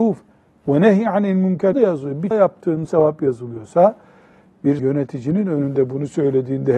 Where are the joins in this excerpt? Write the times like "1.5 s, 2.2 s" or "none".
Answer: 1.7 s, 2.3 s, 2.8 s, 4.8 s